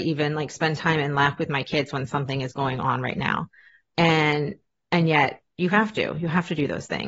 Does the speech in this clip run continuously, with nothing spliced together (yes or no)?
yes